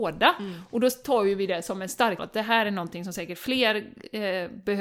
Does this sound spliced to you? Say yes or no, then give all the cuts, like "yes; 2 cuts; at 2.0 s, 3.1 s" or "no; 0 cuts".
yes; 1 cut; at 2.2 s